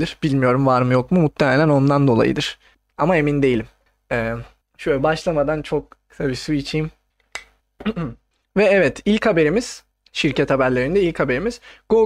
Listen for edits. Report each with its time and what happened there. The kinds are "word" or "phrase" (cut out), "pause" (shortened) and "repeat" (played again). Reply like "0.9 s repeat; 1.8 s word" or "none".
none